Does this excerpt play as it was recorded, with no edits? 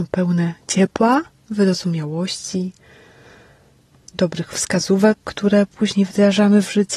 yes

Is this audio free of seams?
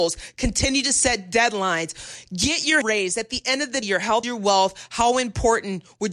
no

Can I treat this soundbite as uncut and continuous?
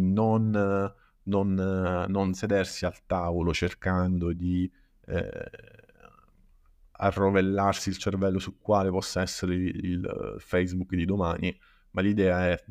yes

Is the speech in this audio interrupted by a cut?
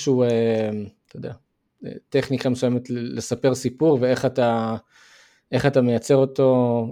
no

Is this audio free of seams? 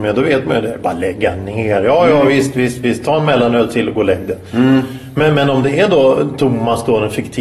yes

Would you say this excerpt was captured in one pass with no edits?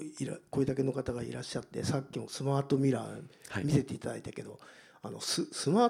yes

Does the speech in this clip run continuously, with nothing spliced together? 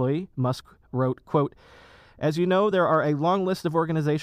yes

